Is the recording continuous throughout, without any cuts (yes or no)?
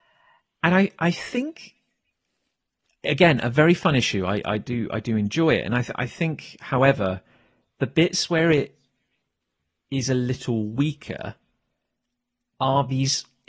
yes